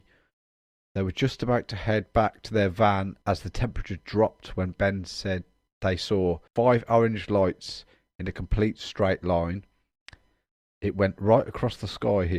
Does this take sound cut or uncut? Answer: cut